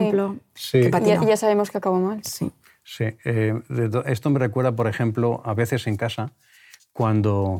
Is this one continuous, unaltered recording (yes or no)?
yes